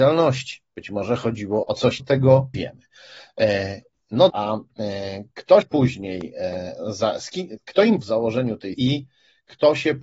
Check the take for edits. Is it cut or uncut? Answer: cut